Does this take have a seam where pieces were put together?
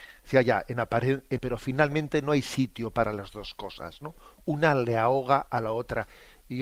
yes; 1 cut; at 1.4 s

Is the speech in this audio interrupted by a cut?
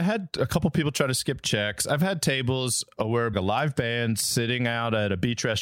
yes; 1 cut; at 3.3 s

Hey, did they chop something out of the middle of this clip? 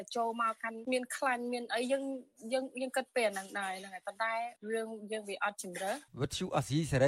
yes; 1 cut; at 6.1 s

